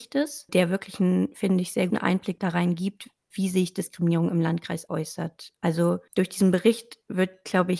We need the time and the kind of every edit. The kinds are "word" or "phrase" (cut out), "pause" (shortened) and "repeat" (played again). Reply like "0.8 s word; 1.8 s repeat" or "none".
1.9 s word; 4.9 s word

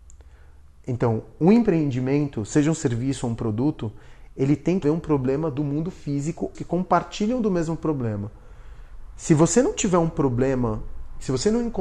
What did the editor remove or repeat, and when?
4.8 s word; 6.5 s phrase

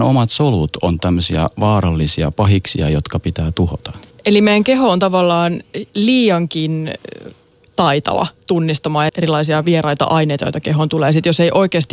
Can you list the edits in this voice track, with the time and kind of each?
4.1 s pause; 5.9 s pause; 9.1 s word

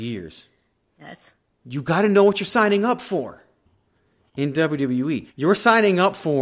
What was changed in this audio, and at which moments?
5.3 s pause

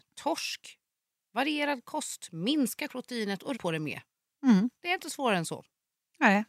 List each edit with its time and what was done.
2.9 s phrase; 3.5 s word

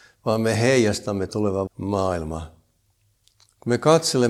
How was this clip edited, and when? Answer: 1.3 s word; 1.7 s phrase

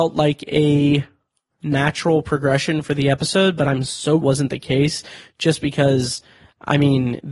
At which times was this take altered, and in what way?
4.2 s phrase

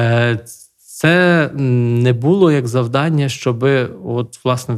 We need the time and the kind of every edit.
none

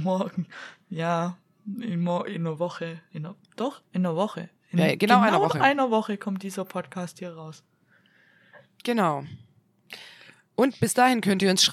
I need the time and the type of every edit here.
none

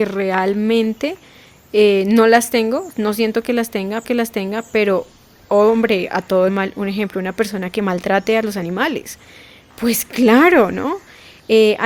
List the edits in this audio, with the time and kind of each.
4.0 s repeat; 6.5 s phrase

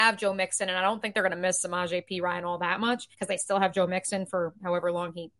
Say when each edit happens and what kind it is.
3.1 s pause

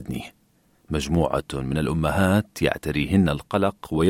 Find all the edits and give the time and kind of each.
none

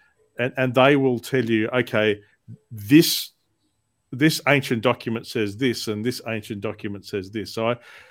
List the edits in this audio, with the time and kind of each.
none

